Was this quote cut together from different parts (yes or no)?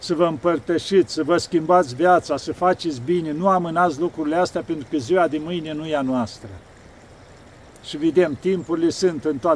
no